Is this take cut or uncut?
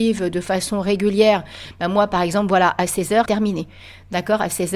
cut